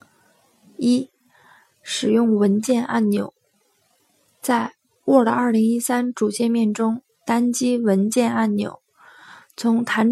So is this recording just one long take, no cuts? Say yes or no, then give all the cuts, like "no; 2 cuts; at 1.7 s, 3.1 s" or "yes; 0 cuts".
yes; 0 cuts